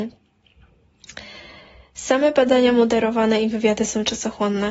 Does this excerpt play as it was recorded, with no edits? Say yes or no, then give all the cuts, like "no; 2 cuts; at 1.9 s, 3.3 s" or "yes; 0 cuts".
yes; 0 cuts